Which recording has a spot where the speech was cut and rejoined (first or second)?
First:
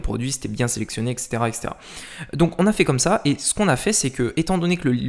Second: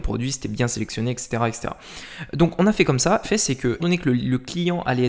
second